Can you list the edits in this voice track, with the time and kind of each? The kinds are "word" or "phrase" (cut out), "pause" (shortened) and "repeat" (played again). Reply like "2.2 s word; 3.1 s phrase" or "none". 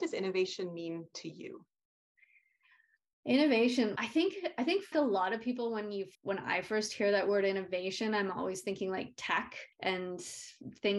4.0 s word; 4.9 s word; 6.1 s pause; 9.7 s pause